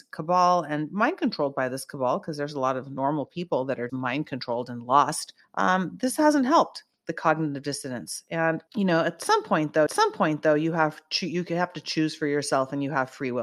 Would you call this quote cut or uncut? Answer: cut